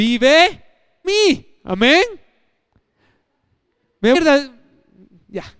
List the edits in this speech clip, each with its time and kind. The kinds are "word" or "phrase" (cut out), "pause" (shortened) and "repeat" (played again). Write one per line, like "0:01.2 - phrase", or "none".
0:01.0 - word
0:04.1 - word

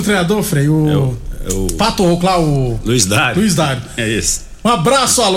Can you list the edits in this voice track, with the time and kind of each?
none

